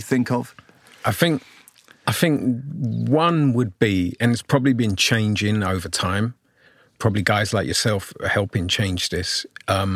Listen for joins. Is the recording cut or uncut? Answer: uncut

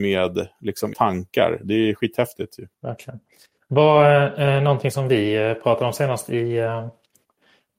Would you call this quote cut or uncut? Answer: cut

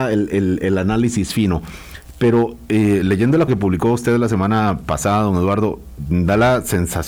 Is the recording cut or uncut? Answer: cut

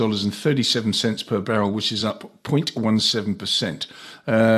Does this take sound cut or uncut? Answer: uncut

